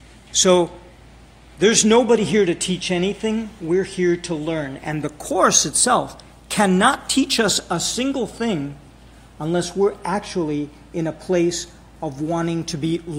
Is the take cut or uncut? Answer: uncut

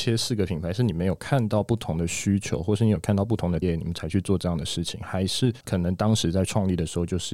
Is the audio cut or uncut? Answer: cut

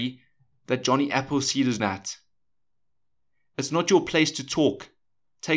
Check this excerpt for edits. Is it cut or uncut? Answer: cut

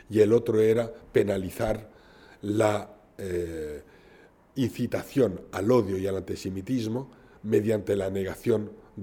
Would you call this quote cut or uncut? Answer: uncut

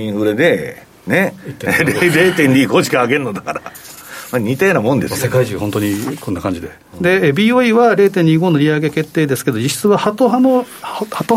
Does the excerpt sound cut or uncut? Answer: uncut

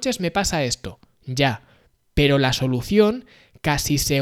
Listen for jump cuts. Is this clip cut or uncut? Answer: uncut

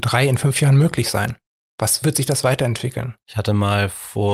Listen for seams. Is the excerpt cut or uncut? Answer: cut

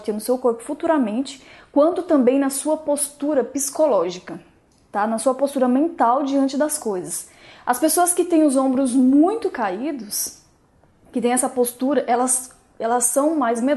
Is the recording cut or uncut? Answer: uncut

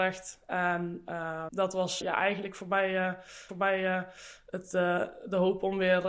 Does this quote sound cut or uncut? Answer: cut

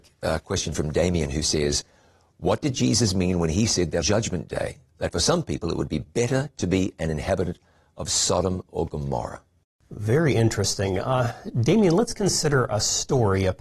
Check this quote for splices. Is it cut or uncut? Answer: cut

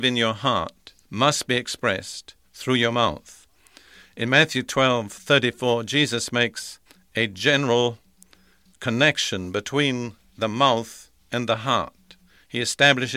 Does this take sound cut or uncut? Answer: cut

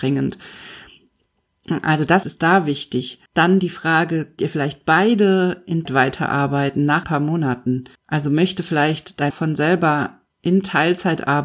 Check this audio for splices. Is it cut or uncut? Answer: cut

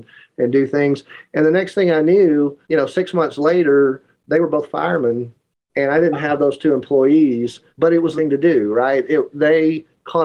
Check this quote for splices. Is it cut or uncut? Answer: cut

